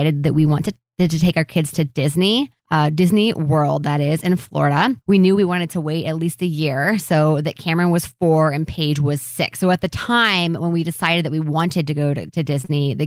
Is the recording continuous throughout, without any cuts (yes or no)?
no